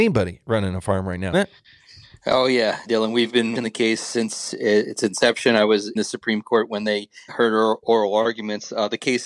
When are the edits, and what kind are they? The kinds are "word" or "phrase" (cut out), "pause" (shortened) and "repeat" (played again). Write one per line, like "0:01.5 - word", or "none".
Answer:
0:01.3 - word
0:02.9 - word
0:03.5 - word
0:06.0 - word
0:07.3 - word